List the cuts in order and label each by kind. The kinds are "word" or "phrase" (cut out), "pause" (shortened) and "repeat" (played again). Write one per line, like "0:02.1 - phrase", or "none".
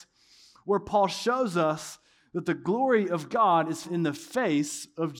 0:03.8 - word